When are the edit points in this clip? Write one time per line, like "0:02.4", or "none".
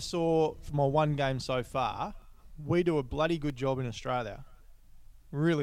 none

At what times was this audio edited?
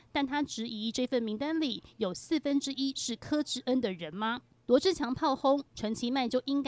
0:05.7

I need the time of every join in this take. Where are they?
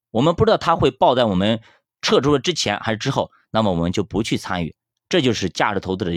none

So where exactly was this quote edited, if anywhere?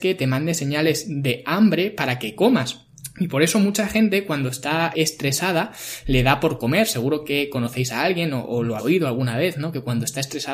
0:04.9
0:08.8

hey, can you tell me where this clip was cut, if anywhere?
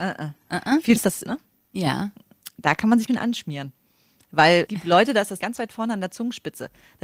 0:01.0
0:01.3
0:03.1
0:04.7
0:05.4

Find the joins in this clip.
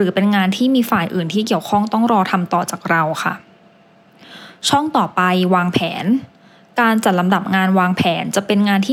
none

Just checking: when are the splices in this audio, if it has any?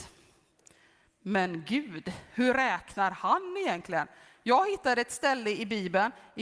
none

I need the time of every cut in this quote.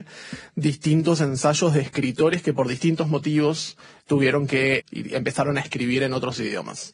0:04.8

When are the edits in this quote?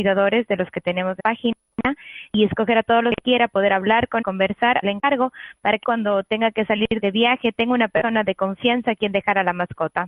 0:01.2
0:02.3
0:04.2
0:04.8
0:05.8
0:07.0

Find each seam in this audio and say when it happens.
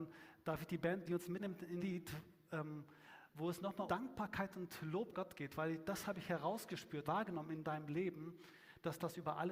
0:01.1
0:01.4
0:01.8
0:03.9
0:05.1
0:07.0

